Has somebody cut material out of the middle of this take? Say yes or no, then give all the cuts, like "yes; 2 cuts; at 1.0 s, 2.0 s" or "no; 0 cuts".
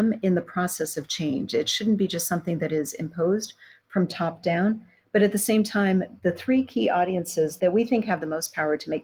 yes; 1 cut; at 6.2 s